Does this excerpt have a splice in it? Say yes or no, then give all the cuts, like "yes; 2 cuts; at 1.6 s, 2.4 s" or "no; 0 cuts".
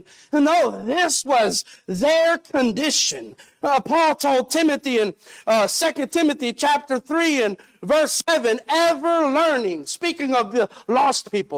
no; 0 cuts